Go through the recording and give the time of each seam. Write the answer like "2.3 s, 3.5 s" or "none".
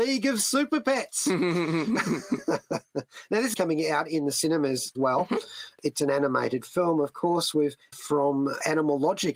3.5 s, 4.9 s, 7.9 s